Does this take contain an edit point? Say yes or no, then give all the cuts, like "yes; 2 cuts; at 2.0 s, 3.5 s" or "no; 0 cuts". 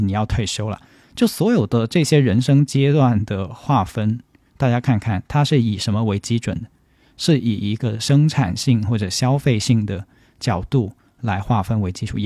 no; 0 cuts